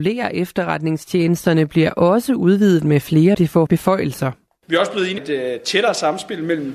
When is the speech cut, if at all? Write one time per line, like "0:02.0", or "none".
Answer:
0:03.3
0:03.7
0:05.2